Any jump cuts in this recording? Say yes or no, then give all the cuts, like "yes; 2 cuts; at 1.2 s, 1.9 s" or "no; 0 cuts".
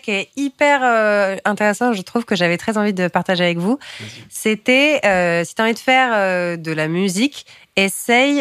no; 0 cuts